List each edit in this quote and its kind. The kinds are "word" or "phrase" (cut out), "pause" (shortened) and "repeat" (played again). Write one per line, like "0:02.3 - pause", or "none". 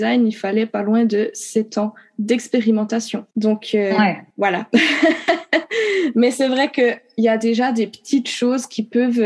0:03.3 - pause
0:04.3 - pause

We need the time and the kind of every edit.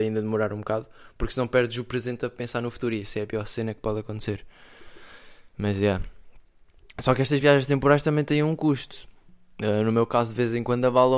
none

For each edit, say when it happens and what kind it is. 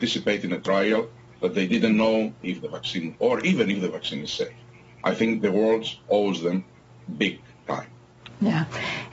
0:03.2 - word

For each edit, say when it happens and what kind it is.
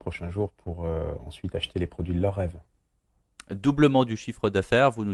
none

